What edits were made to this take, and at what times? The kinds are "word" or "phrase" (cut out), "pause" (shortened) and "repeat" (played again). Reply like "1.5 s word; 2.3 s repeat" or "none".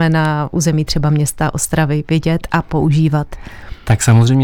none